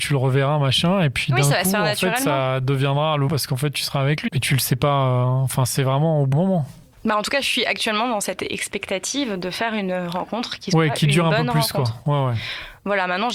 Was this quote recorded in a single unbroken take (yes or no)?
no